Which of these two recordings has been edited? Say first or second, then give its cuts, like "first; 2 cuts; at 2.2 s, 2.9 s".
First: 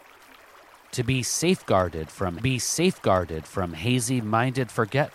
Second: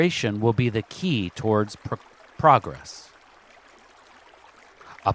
first; 1 cut; at 2.4 s